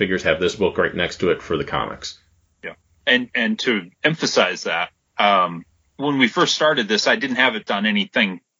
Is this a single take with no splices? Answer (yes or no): no